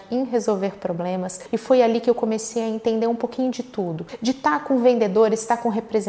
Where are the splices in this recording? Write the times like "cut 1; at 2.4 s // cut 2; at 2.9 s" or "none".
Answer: none